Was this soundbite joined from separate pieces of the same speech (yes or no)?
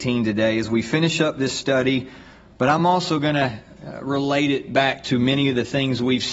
no